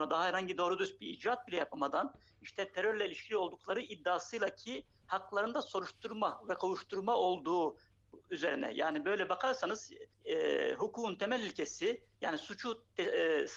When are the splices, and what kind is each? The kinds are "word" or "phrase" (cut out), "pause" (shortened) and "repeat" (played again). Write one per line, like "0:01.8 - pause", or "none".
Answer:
0:10.1 - pause
0:12.1 - pause